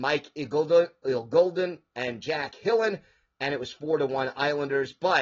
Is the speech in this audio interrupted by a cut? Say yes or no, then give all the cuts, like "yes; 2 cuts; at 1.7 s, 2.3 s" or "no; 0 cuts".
no; 0 cuts